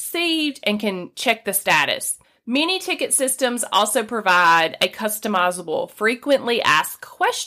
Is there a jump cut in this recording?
yes; 1 cut; at 2.2 s

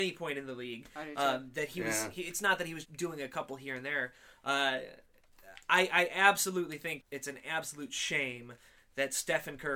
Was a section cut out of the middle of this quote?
yes; 2 cuts; at 2.8 s, 7.0 s

